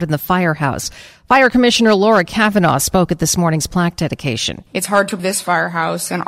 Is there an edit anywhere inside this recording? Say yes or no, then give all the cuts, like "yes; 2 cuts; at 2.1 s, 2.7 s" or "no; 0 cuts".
yes; 1 cut; at 5.2 s